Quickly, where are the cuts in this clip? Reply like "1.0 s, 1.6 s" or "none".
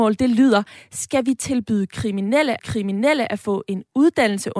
2.6 s